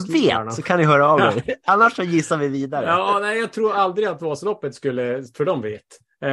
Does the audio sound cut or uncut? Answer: uncut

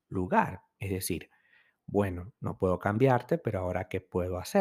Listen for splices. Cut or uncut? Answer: uncut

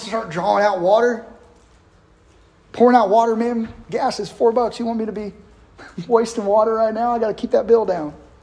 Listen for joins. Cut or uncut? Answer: uncut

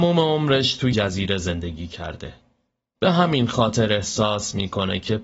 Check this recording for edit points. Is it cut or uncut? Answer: cut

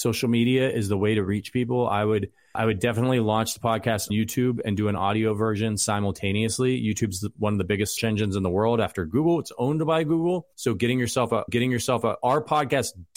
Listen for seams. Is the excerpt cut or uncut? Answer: cut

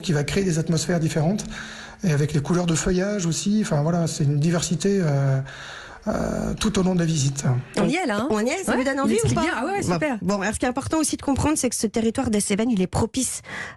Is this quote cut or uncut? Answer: uncut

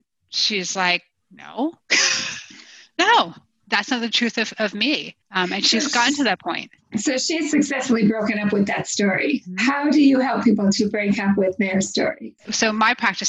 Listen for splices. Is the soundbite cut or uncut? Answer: cut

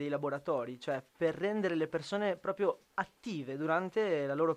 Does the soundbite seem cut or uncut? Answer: uncut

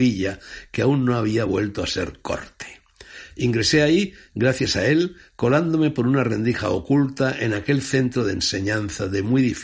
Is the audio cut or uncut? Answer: uncut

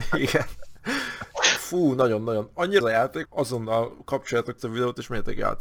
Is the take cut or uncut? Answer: cut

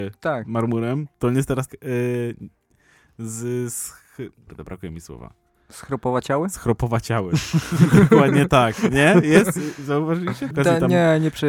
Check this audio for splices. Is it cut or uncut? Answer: cut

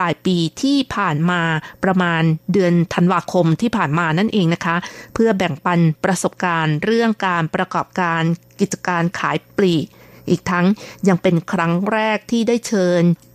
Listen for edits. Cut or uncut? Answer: uncut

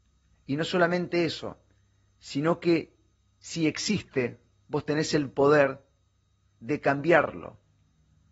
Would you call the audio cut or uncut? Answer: uncut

